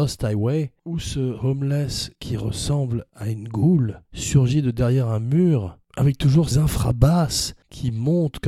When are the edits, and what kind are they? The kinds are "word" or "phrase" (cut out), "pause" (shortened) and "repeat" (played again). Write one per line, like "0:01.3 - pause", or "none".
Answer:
0:06.5 - word